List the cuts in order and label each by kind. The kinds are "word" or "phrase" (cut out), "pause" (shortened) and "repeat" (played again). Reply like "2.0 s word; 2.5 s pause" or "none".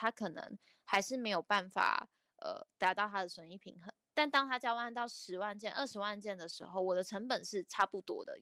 none